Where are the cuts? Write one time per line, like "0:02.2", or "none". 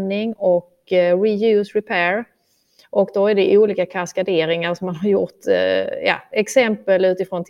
none

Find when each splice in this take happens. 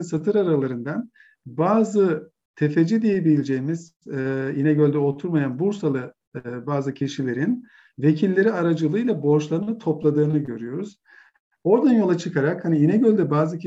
none

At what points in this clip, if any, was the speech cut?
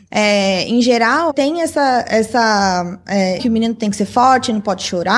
0:01.3
0:03.4

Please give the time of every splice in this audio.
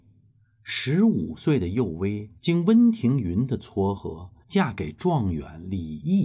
0:02.4
0:04.4

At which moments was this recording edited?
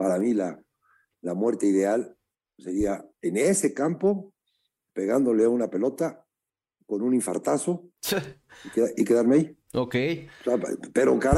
0:09.6

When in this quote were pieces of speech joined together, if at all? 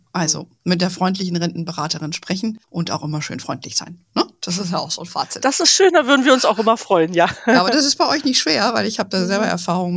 0:02.6

